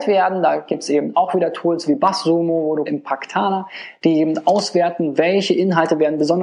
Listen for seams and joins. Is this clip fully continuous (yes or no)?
no